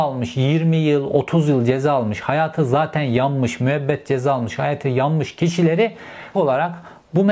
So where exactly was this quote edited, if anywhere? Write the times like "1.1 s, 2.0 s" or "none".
6.3 s